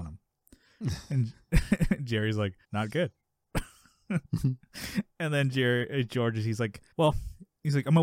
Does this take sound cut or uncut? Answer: cut